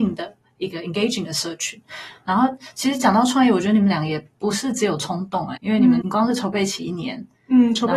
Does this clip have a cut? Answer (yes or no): yes